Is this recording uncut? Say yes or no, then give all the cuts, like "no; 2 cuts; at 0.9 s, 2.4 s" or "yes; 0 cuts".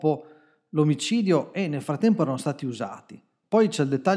yes; 0 cuts